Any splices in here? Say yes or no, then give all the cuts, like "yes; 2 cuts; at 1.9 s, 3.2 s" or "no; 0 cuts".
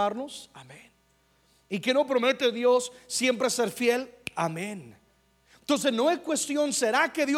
no; 0 cuts